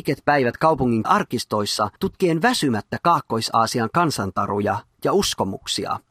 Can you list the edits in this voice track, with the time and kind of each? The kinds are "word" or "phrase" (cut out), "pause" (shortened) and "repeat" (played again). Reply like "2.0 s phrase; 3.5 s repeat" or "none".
1.0 s phrase; 2.0 s pause